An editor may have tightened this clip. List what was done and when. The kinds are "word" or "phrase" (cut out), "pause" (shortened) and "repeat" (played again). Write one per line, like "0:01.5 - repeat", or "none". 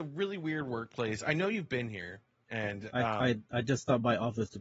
none